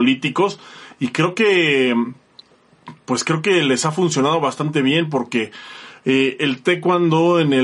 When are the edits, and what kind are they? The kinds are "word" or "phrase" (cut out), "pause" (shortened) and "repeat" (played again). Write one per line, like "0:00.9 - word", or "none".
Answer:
none